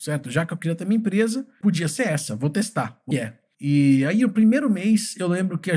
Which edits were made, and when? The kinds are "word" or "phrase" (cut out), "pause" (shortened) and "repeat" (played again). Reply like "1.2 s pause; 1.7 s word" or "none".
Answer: 1.6 s word; 3.1 s phrase